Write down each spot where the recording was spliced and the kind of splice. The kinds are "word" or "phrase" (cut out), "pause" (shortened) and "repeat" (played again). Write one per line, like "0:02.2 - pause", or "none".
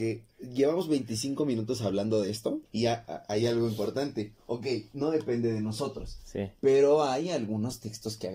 0:02.7 - pause